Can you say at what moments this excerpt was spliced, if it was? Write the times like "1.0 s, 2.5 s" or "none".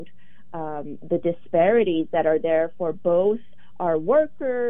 none